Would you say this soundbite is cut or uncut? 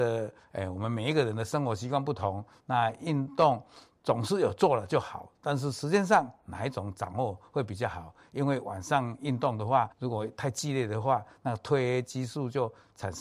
cut